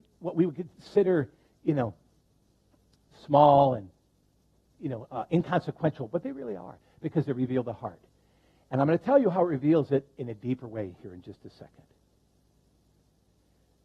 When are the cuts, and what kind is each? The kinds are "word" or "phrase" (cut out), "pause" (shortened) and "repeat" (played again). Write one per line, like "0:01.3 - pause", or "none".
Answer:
none